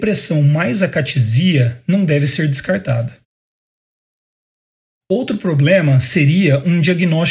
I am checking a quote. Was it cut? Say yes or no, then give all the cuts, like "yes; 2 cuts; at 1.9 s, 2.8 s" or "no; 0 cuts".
no; 0 cuts